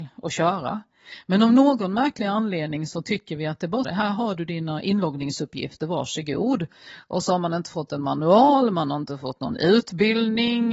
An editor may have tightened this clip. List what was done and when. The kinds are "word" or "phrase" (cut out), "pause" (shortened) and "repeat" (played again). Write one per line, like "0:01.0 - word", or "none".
0:03.8 - word

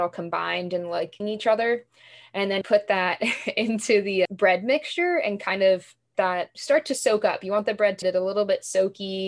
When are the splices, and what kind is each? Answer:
0:01.2 - word
0:02.6 - word
0:04.2 - word
0:06.1 - word
0:06.5 - word
0:08.0 - word

